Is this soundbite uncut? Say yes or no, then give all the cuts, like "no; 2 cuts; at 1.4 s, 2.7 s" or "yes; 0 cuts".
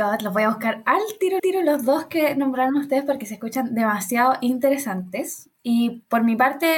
no; 1 cut; at 1.4 s